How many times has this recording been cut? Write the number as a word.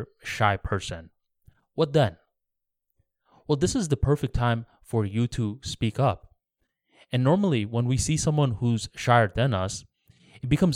zero